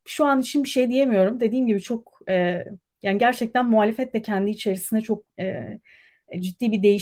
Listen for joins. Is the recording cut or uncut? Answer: cut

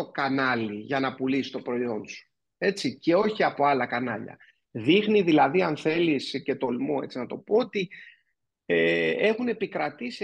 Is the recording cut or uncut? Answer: uncut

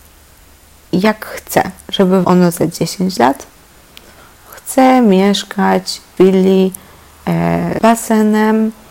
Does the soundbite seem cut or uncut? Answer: cut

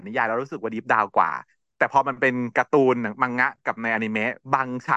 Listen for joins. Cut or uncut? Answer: uncut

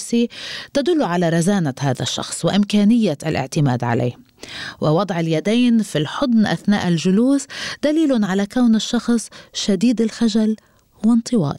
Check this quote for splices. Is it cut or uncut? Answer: uncut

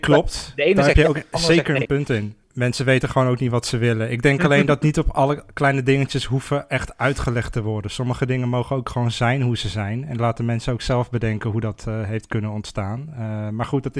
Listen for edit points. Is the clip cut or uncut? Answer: cut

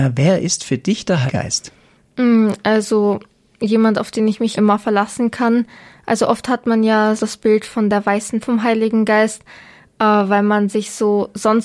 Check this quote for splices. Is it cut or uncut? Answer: cut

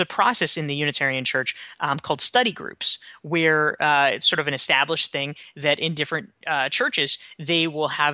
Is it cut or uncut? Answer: uncut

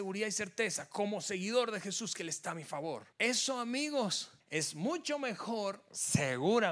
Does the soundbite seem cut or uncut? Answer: cut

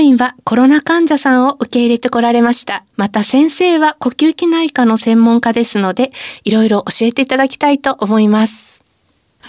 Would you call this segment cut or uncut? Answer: cut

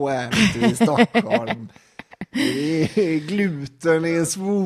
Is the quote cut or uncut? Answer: uncut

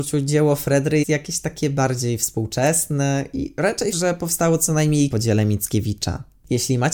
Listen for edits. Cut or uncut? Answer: cut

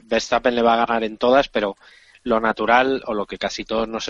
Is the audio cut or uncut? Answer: uncut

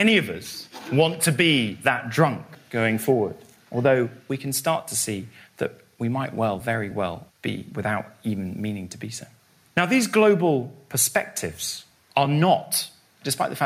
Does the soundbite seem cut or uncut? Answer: uncut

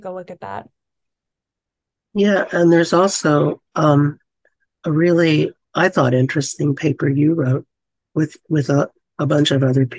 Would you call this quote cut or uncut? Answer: uncut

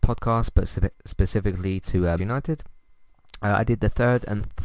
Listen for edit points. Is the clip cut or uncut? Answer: cut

